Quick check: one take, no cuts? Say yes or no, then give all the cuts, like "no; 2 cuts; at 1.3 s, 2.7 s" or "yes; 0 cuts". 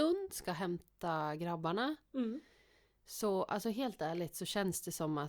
yes; 0 cuts